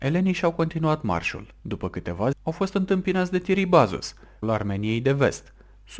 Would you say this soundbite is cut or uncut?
cut